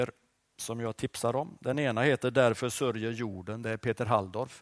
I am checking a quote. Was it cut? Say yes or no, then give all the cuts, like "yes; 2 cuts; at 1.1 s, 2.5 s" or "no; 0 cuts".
no; 0 cuts